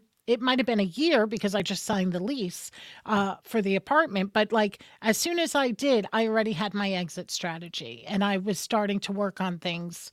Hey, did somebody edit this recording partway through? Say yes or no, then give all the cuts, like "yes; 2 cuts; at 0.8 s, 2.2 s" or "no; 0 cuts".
no; 0 cuts